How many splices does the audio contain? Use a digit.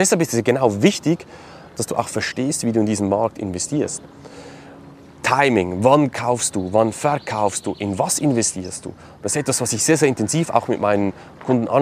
0